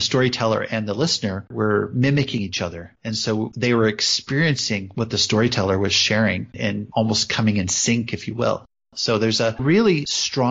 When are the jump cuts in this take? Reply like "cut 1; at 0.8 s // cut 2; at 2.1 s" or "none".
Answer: none